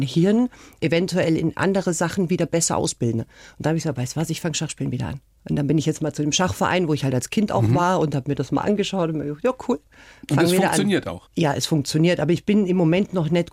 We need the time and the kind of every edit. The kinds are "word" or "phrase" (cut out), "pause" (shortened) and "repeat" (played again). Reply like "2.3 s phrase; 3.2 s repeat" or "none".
none